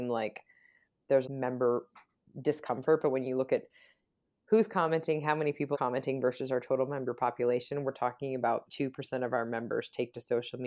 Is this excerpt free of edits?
no; 3 cuts; at 1.2 s, 5.7 s, 8.7 s

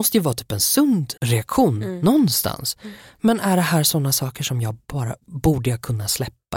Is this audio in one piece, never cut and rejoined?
no; 1 cut; at 1.2 s

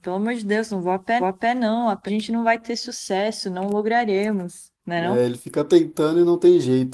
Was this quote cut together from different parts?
yes; 2 cuts; at 1.2 s, 2.1 s

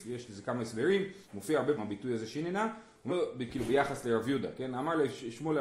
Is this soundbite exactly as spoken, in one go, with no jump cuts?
no; 3 cuts; at 1.2 s, 1.8 s, 3.1 s

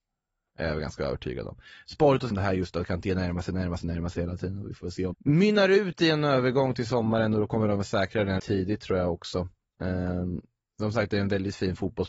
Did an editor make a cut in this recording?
yes; 3 cuts; at 2.3 s, 5.1 s, 8.4 s

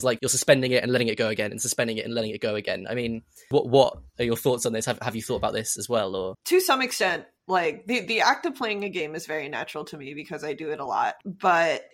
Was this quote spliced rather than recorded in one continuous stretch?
no; 0 cuts

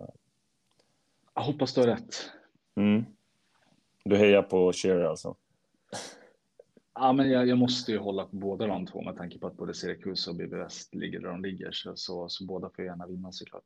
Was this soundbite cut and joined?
no; 0 cuts

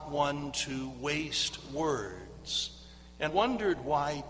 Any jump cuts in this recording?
yes; 1 cut; at 3.3 s

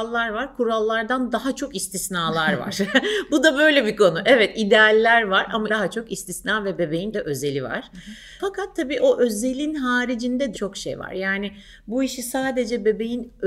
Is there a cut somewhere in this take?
yes; 3 cuts; at 5.7 s, 7.1 s, 10.5 s

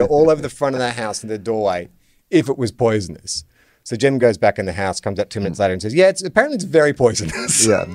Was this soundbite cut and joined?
no; 0 cuts

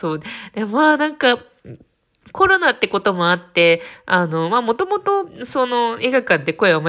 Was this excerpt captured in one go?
yes; 0 cuts

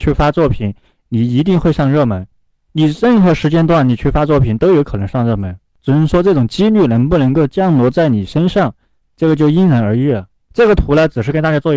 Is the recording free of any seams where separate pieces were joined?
yes; 0 cuts

